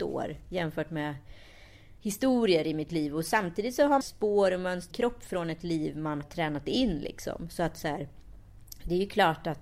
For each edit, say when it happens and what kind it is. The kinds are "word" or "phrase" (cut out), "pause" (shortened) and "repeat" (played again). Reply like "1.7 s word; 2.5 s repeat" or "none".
2.0 s pause; 4.0 s phrase; 4.9 s phrase; 6.2 s word